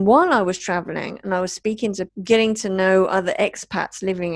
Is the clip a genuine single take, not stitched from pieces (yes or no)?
no